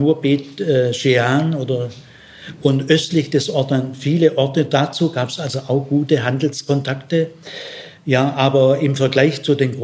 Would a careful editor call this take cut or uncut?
uncut